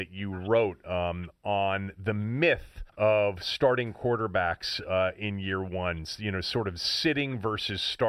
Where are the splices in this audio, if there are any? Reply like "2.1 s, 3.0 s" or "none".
2.9 s